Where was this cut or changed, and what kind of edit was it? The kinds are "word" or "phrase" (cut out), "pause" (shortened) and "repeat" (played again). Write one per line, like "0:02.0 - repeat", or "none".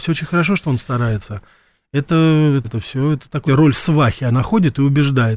0:02.6 - word
0:03.5 - word